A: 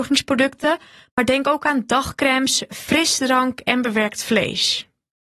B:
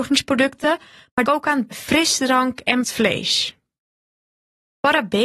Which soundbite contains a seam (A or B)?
B